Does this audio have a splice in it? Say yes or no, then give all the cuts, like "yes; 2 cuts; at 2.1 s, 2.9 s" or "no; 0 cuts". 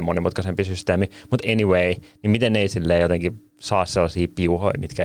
no; 0 cuts